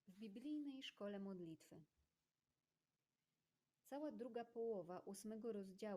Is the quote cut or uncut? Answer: uncut